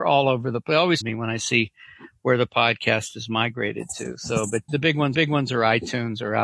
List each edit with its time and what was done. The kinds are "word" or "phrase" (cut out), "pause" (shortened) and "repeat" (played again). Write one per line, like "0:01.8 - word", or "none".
0:01.0 - word
0:04.7 - word
0:05.1 - repeat